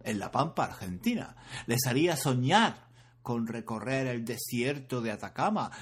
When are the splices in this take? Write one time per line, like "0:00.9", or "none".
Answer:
none